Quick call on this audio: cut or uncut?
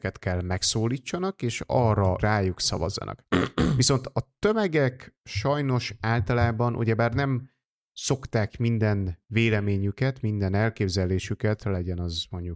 cut